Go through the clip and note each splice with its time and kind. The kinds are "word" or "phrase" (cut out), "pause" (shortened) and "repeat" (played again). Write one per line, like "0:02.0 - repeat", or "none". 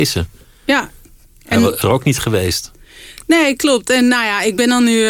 0:01.8 - word